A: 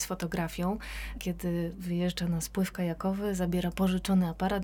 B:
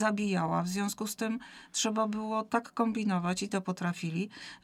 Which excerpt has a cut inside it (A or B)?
B